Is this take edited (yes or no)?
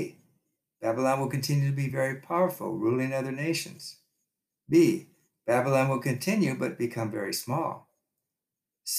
no